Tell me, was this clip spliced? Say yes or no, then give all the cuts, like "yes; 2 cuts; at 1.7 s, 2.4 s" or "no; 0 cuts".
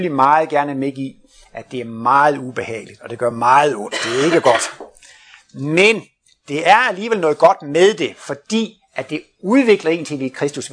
no; 0 cuts